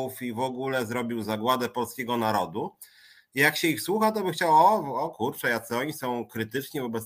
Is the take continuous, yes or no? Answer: yes